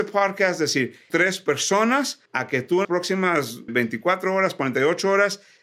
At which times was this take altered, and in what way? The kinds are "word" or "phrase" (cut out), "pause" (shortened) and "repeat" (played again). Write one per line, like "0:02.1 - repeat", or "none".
0:01.1 - phrase
0:02.3 - pause
0:02.8 - word
0:03.7 - word